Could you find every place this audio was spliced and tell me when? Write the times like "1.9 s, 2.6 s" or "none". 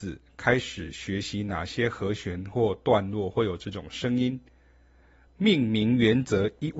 none